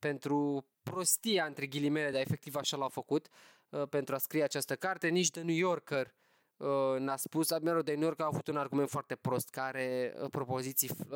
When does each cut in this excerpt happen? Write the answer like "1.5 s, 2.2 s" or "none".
none